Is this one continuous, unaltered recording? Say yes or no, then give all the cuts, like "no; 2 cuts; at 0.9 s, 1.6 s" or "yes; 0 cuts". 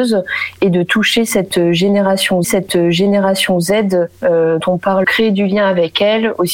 no; 3 cuts; at 2.4 s, 4.6 s, 5.0 s